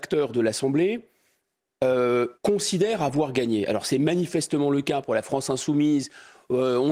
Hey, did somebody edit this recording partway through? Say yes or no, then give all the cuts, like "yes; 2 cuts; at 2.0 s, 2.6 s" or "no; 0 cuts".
yes; 1 cut; at 2.3 s